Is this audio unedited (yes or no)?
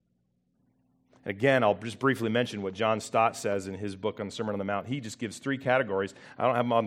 yes